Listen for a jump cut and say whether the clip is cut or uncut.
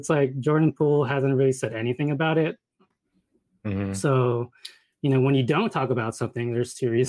uncut